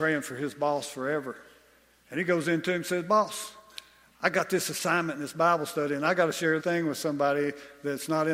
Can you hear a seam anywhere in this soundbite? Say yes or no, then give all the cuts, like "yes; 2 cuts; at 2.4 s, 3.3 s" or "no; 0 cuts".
yes; 1 cut; at 6.6 s